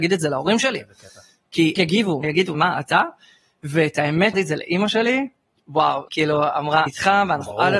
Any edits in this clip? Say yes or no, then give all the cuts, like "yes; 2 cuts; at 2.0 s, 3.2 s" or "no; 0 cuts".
yes; 6 cuts; at 1.8 s, 2.2 s, 2.5 s, 4.3 s, 6.1 s, 6.9 s